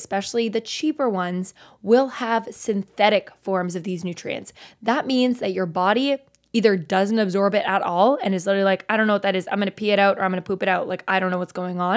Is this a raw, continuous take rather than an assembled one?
yes; 0 cuts

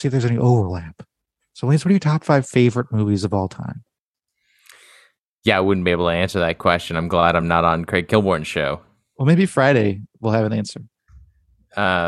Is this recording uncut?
yes; 0 cuts

